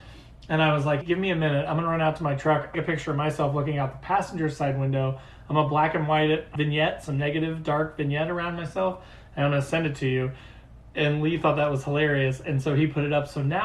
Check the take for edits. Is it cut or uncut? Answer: cut